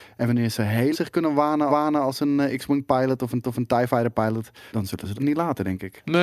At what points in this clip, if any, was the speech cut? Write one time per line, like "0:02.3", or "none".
0:00.9
0:01.7
0:03.4
0:04.7
0:05.2